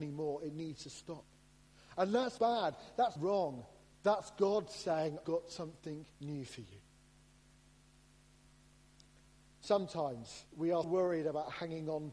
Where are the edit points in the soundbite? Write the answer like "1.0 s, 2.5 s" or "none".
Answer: 2.4 s, 3.2 s, 5.2 s, 6.1 s, 10.5 s, 10.8 s